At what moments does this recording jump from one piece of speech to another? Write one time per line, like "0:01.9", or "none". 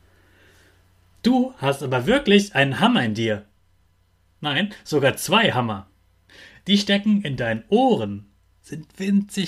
0:06.3